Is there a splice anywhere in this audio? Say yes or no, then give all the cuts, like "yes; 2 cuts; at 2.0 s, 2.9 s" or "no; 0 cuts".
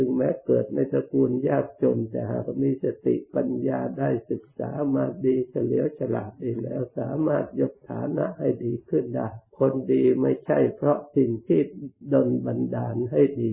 yes; 1 cut; at 9.5 s